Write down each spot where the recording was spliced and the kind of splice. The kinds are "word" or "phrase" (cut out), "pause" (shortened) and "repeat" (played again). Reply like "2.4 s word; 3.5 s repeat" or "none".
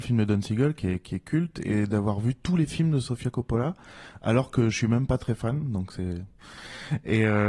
none